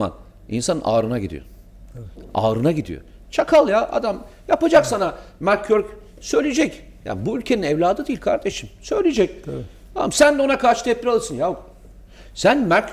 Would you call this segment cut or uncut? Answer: uncut